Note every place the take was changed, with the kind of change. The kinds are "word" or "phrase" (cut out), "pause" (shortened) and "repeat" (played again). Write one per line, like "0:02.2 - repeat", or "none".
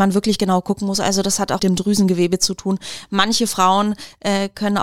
0:01.6 - phrase